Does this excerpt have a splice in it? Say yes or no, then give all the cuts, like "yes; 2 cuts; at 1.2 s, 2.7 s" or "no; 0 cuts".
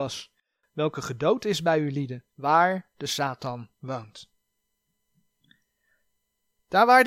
yes; 2 cuts; at 2.3 s, 3.7 s